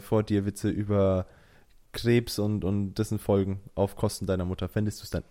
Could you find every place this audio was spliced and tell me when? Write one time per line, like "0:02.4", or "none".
none